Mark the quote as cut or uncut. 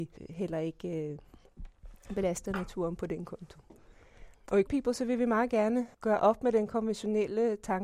cut